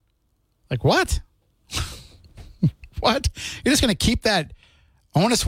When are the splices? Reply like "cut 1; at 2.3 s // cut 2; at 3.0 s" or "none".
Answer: none